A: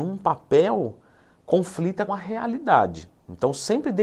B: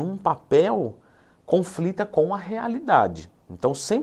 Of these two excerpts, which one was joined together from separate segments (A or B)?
A